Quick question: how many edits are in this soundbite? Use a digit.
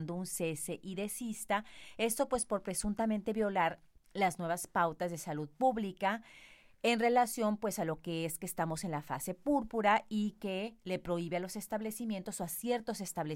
0